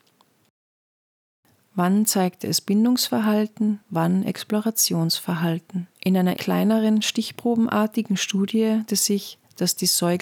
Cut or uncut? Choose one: cut